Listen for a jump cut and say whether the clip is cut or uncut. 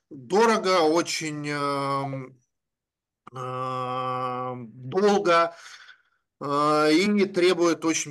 uncut